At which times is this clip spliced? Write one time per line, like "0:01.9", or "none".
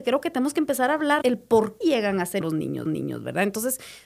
0:01.2
0:01.8
0:02.4
0:02.9